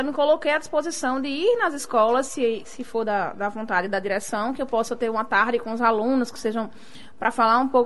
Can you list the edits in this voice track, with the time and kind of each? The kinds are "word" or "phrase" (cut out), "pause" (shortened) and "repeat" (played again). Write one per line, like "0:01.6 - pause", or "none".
none